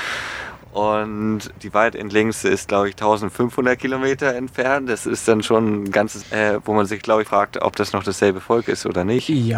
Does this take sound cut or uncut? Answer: cut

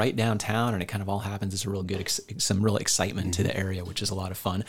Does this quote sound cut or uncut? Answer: uncut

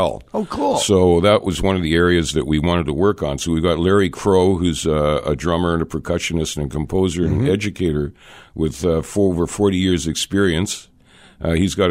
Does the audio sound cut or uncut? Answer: uncut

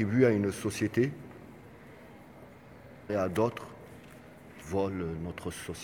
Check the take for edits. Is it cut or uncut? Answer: cut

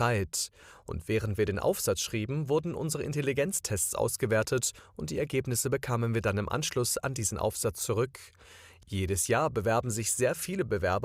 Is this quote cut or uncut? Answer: uncut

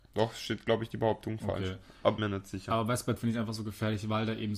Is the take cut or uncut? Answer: cut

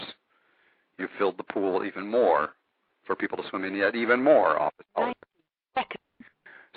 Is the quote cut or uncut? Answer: uncut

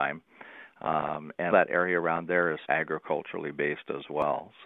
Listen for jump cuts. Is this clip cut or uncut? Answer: cut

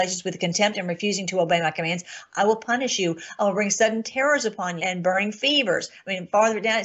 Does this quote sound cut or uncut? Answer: cut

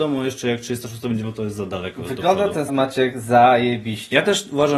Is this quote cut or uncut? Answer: cut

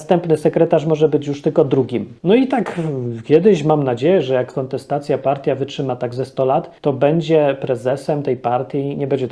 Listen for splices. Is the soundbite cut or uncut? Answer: cut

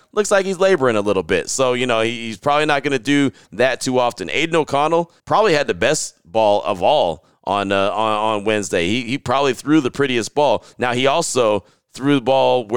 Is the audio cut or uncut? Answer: cut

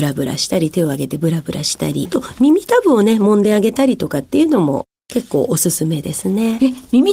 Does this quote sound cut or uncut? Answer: cut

